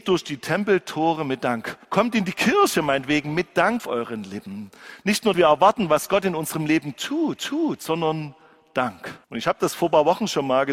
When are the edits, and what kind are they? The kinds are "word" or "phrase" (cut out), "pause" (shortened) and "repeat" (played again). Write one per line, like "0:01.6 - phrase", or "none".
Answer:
0:01.8 - pause
0:03.8 - word
0:05.3 - word
0:07.4 - repeat
0:09.2 - pause